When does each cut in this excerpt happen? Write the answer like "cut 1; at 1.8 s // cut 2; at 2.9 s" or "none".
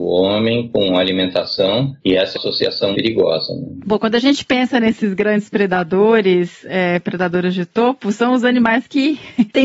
cut 1; at 2.4 s // cut 2; at 2.9 s

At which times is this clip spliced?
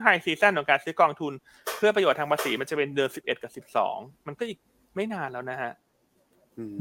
none

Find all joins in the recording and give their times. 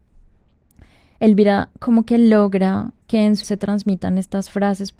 cut 1; at 3.0 s // cut 2; at 3.4 s

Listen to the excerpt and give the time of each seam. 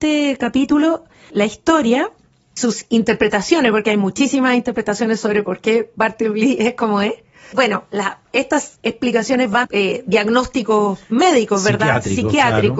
cut 1; at 1.3 s // cut 2; at 2.6 s // cut 3; at 7.5 s // cut 4; at 9.6 s

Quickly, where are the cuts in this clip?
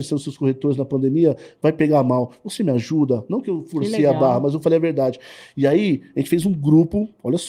none

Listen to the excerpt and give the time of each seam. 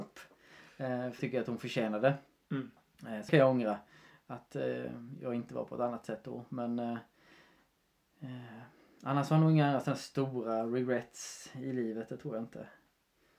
cut 1; at 1.2 s // cut 2; at 3.3 s

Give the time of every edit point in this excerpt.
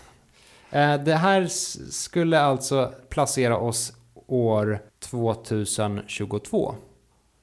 cut 1; at 4.9 s

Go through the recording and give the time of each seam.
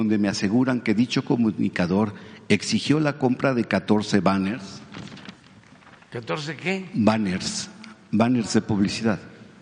none

